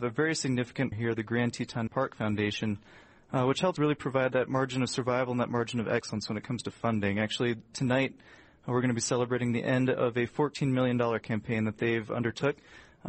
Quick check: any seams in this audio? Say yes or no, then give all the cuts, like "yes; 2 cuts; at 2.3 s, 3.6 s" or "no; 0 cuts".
yes; 4 cuts; at 0.9 s, 1.9 s, 3.8 s, 11.2 s